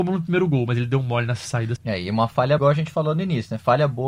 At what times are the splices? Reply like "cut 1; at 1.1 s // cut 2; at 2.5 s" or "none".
cut 1; at 1.8 s // cut 2; at 2.6 s